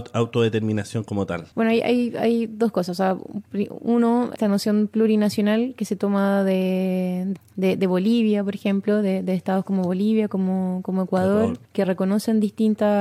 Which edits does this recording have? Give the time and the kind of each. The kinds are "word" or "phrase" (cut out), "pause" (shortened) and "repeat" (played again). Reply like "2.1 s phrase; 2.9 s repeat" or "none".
1.5 s pause; 11.7 s pause